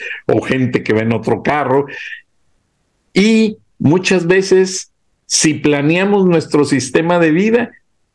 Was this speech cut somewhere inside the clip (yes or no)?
no